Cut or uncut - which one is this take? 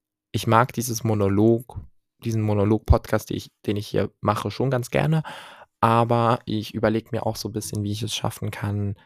uncut